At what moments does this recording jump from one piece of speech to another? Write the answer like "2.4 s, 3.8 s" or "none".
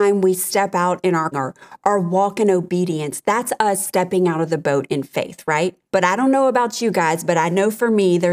1.3 s, 5.8 s

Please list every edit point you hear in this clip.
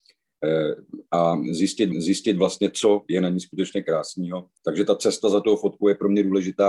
1.1 s, 1.9 s, 4.6 s

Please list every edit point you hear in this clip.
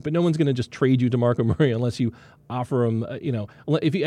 none

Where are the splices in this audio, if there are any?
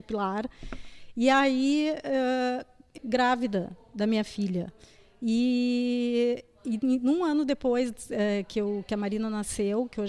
3.0 s

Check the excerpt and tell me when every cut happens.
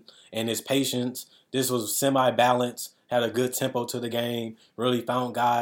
none

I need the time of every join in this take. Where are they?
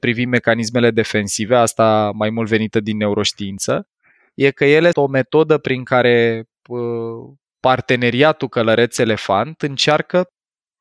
4.9 s

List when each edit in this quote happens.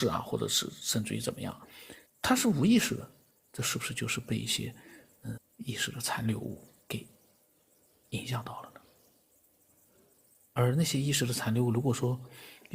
2.1 s, 3.3 s, 5.4 s, 6.8 s

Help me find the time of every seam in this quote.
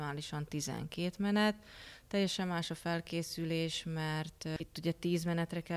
none

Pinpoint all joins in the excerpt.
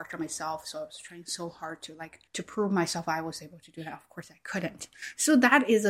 2.3 s

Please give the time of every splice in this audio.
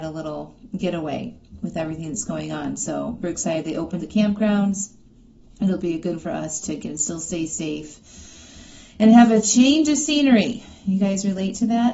3.2 s, 4.0 s, 6.2 s, 6.8 s

